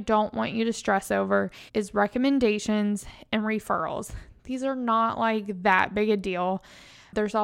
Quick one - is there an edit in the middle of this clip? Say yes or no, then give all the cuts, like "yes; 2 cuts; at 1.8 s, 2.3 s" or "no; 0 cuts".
yes; 1 cut; at 1.7 s